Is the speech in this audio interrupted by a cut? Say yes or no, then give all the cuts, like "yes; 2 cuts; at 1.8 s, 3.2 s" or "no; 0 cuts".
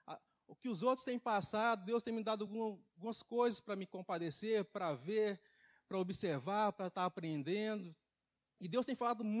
no; 0 cuts